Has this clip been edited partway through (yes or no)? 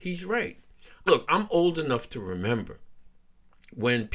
yes